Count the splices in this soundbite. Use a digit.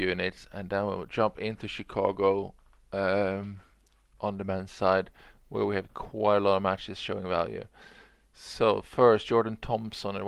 0